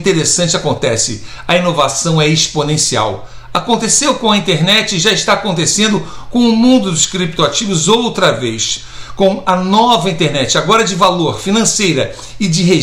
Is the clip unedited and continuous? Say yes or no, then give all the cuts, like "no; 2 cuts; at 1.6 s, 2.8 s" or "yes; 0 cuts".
yes; 0 cuts